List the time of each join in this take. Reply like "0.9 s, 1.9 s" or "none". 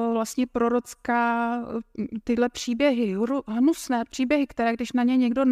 none